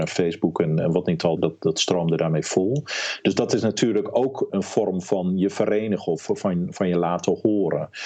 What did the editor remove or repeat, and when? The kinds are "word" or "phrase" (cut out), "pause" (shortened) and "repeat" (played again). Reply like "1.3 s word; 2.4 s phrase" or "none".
1.4 s word; 4.5 s word; 6.2 s word

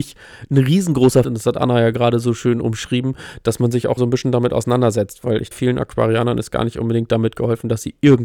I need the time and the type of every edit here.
1.2 s word; 4.0 s word; 5.5 s word

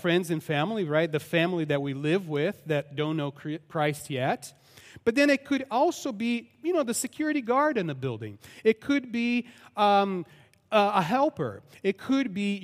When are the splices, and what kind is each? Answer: none

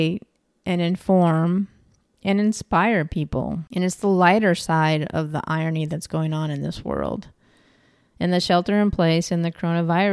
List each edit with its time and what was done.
none

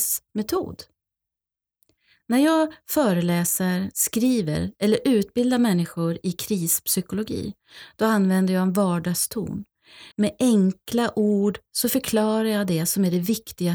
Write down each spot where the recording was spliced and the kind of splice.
10.1 s pause

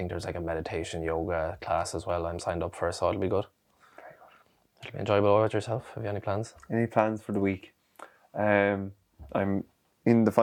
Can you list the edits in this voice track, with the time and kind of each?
none

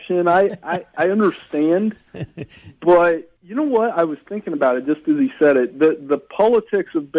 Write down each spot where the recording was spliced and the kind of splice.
3.4 s pause

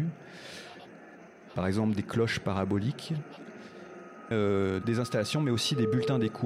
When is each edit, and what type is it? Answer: 4.3 s word; 4.8 s word

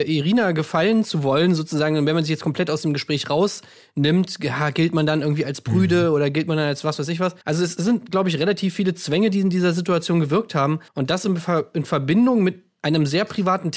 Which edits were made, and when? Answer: 7.4 s pause; 10.9 s pause

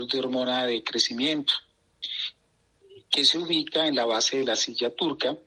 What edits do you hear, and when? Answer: none

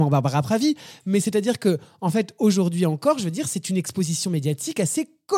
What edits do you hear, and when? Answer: none

